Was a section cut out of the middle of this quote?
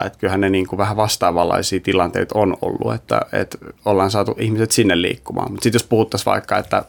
yes; 1 cut; at 3.8 s

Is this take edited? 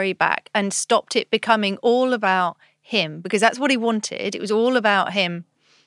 no; 0 cuts

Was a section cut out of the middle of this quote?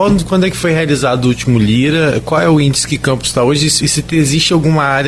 yes; 1 cut; at 3.8 s

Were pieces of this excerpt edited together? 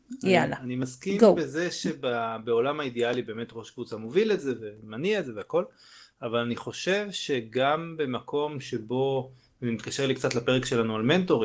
no; 0 cuts

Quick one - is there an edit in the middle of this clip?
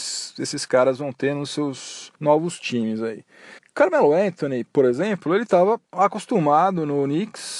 yes; 2 cuts; at 2.1 s, 3.6 s

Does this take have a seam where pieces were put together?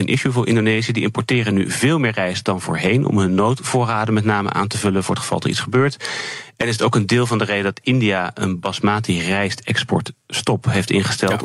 no; 0 cuts

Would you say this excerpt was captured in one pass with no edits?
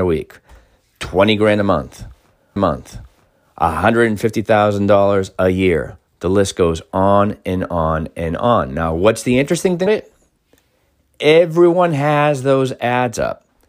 no; 3 cuts; at 2.6 s, 6.1 s, 9.9 s

